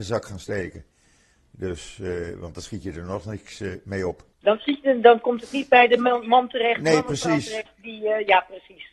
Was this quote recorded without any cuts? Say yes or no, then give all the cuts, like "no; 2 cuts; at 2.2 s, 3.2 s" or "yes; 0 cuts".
no; 1 cut; at 4.3 s